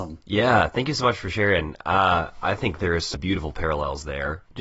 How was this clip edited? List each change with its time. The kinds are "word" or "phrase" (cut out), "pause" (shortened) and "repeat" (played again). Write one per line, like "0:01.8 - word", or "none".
0:03.1 - word